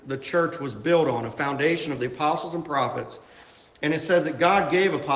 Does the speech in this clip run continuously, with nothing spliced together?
yes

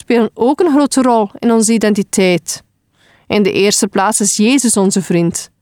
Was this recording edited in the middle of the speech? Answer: no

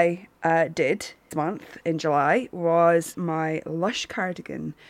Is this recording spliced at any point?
yes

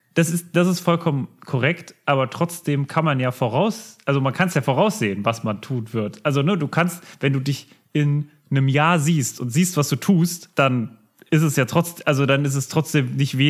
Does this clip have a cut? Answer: yes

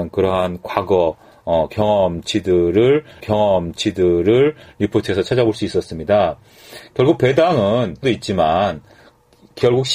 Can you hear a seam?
yes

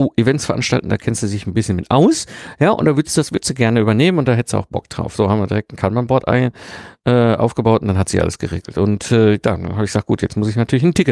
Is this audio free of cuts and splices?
yes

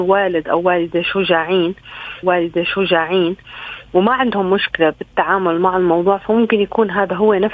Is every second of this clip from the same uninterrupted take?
no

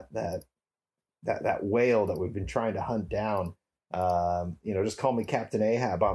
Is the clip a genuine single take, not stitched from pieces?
yes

